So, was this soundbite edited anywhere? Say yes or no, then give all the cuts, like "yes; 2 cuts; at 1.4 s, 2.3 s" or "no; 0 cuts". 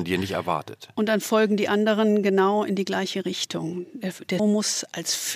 yes; 1 cut; at 4.4 s